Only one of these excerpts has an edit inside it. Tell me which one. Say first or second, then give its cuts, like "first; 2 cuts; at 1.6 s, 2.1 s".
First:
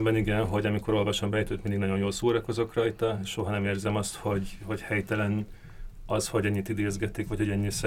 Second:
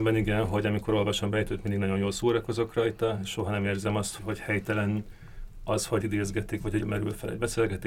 second; 3 cuts; at 4.2 s, 6.0 s, 6.8 s